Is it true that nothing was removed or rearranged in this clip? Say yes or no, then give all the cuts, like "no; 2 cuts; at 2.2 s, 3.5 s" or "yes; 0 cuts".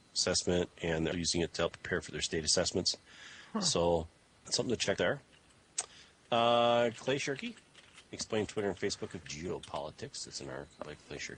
no; 6 cuts; at 1.1 s, 1.7 s, 4.4 s, 5.0 s, 8.5 s, 9.2 s